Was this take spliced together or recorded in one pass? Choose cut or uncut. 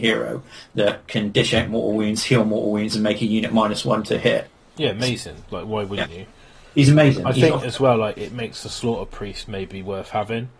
uncut